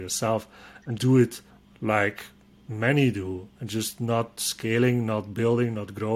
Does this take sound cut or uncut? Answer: cut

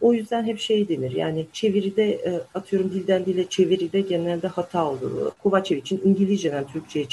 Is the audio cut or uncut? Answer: uncut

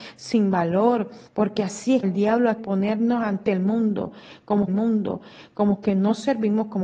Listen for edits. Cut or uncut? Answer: cut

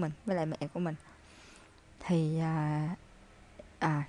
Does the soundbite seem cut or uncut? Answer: uncut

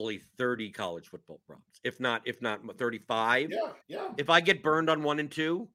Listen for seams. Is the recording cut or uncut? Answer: cut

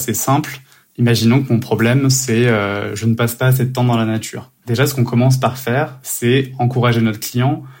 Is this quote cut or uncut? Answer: cut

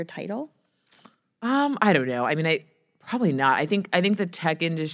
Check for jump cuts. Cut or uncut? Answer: uncut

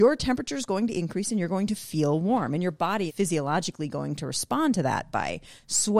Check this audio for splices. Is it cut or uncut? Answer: cut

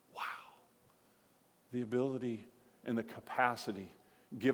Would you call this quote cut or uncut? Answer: uncut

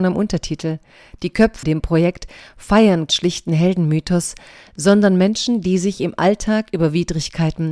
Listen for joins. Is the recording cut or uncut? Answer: cut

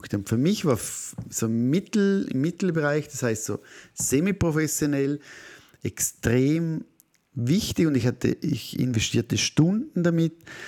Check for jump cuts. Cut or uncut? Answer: uncut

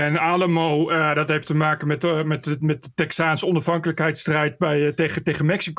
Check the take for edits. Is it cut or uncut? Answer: uncut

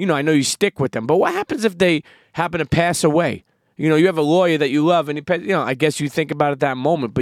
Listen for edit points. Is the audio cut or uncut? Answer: uncut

